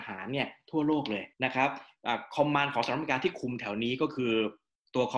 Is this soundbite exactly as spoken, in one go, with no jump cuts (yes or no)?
no